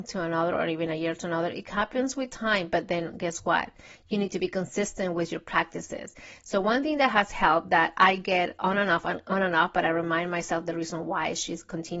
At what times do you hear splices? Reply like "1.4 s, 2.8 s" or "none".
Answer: none